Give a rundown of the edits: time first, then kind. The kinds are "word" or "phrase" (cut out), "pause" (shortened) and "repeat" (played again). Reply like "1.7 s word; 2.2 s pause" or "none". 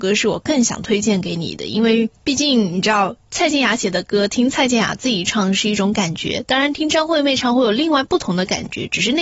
2.2 s pause